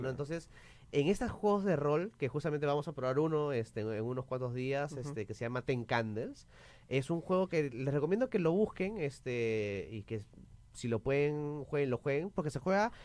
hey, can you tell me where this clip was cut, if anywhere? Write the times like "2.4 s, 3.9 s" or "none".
none